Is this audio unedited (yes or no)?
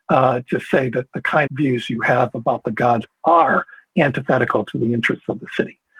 no